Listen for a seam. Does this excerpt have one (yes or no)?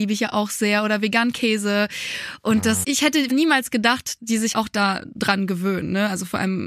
yes